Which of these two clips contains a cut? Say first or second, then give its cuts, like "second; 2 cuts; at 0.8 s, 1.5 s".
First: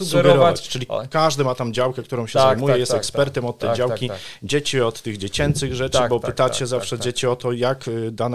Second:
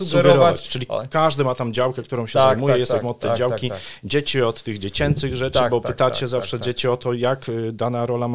second; 1 cut; at 3.0 s